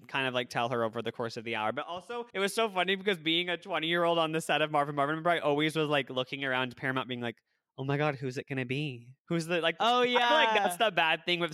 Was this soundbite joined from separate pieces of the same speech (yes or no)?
yes